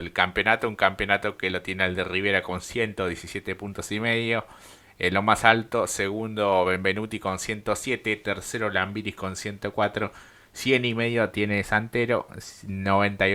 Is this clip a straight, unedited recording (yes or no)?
yes